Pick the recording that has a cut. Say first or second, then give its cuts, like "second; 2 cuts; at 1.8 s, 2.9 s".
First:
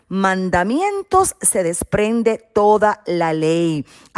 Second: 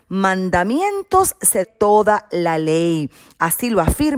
second; 1 cut; at 1.6 s